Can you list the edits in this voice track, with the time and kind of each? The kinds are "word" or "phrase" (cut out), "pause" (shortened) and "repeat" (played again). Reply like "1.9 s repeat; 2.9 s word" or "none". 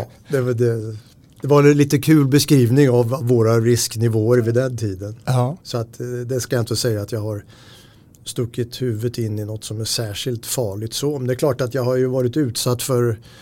5.6 s pause

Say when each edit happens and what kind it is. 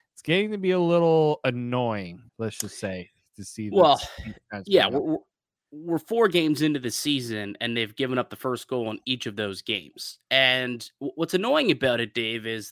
2.3 s pause

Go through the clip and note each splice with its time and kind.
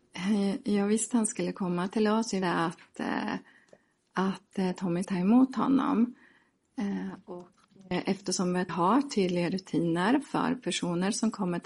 1.1 s word; 2.4 s word; 5.0 s word; 8.7 s word

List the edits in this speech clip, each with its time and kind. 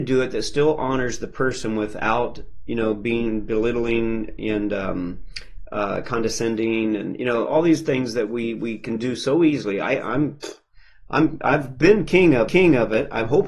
12.5 s repeat

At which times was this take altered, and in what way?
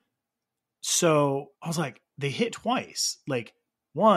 1.5 s pause; 2.1 s pause; 2.5 s word

